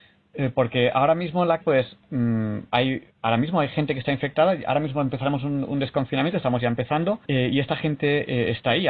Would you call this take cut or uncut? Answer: cut